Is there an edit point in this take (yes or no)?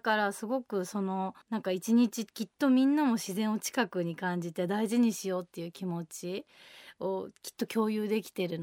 yes